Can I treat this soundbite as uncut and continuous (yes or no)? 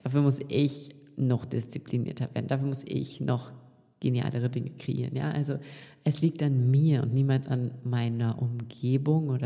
yes